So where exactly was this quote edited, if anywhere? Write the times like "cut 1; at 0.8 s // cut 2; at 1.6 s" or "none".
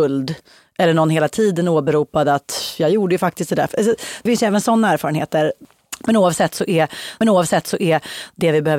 cut 1; at 4.3 s // cut 2; at 7.2 s